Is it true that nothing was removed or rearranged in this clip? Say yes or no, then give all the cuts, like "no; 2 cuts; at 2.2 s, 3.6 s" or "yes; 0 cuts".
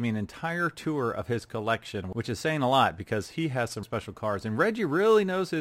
no; 1 cut; at 3.8 s